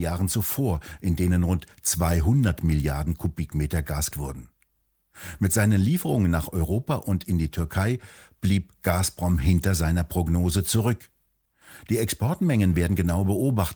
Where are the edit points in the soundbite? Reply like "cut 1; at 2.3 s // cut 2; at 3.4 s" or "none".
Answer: cut 1; at 4.1 s